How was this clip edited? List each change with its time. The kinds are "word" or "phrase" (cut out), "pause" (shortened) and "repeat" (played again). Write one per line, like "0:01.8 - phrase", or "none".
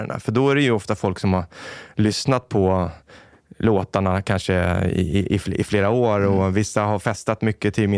none